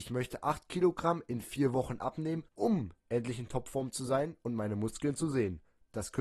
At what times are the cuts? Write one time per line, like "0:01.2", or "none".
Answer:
0:02.5